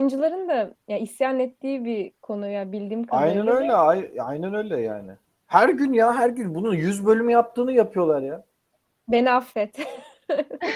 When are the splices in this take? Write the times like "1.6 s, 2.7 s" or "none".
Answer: none

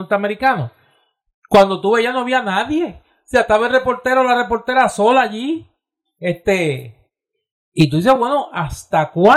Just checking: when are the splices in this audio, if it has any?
none

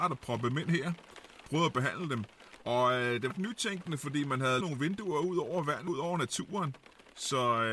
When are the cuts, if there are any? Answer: 1.5 s, 3.3 s, 4.6 s, 5.9 s

